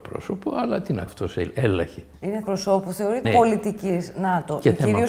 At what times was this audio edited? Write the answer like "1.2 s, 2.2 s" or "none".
1.1 s, 2.4 s, 3.2 s

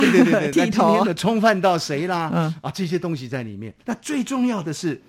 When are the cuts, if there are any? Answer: 2.7 s, 3.8 s

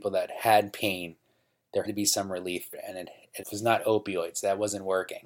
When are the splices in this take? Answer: 1.8 s, 2.7 s, 3.4 s

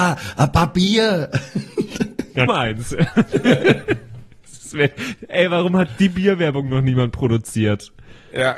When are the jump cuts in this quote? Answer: 2.5 s

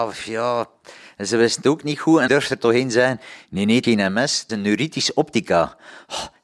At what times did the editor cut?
2.3 s, 3.8 s, 4.5 s

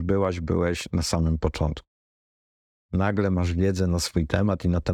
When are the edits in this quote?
none

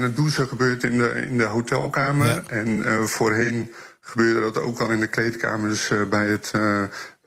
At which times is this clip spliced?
none

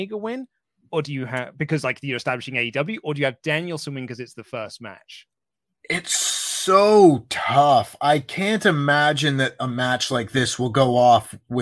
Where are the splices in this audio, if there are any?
none

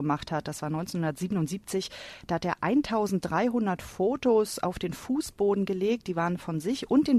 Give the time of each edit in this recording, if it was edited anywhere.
none

